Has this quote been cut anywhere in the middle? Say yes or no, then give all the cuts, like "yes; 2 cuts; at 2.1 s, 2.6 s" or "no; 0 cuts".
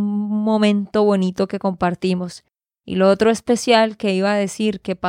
no; 0 cuts